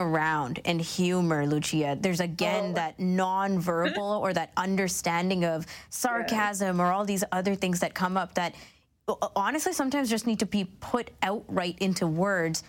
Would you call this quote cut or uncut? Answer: uncut